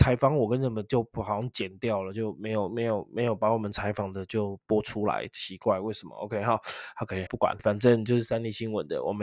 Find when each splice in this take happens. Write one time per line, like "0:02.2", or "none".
0:07.3
0:07.6